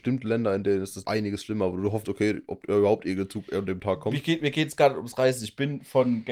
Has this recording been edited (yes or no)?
yes